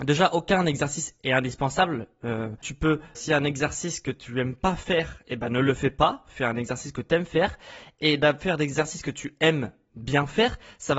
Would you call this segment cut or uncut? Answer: cut